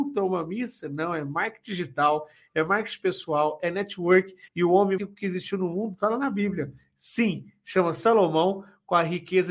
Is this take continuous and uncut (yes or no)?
no